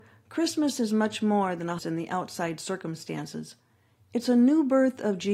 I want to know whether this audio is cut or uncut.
cut